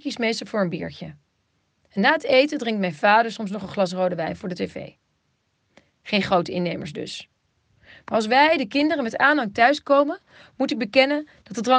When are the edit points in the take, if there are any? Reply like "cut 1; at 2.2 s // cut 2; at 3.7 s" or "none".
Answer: none